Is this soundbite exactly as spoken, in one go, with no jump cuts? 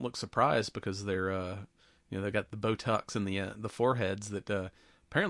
yes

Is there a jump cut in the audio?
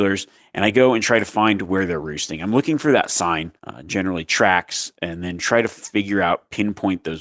yes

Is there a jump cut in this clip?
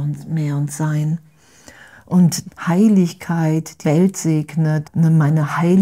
yes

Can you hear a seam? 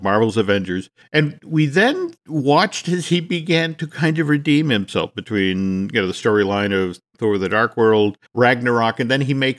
yes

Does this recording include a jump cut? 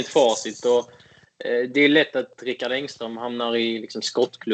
no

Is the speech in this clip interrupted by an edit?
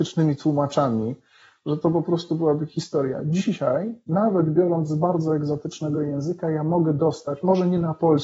no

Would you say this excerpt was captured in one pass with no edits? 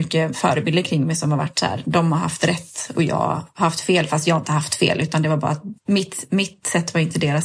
no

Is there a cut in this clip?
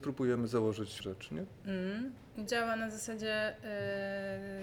yes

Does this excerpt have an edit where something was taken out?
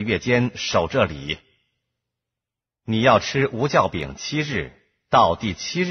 no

